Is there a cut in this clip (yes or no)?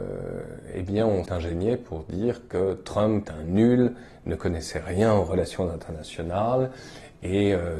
yes